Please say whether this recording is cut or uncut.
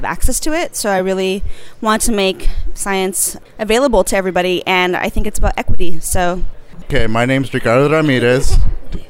uncut